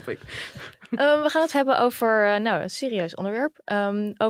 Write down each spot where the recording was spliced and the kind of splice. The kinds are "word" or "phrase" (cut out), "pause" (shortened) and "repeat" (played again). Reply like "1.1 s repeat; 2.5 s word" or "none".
1.5 s word